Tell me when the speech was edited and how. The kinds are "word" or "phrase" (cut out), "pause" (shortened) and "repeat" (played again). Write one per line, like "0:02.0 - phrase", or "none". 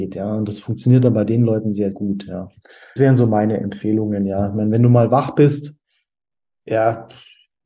0:01.9 - word
0:03.0 - word